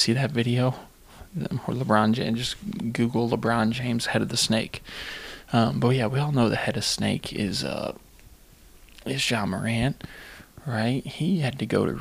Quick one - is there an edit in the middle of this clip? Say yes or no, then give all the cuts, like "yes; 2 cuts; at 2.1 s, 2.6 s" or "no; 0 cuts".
no; 0 cuts